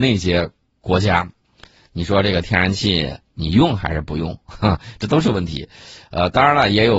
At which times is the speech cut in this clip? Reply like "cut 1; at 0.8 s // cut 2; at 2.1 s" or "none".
none